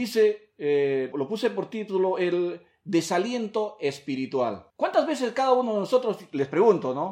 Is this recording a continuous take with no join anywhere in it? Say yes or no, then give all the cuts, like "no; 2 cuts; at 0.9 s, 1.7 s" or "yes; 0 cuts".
no; 2 cuts; at 1.1 s, 4.7 s